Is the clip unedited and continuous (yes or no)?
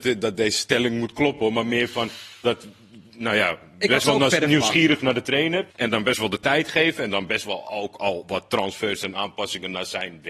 no